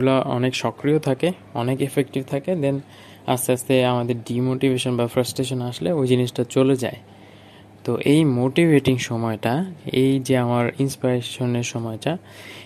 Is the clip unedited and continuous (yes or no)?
yes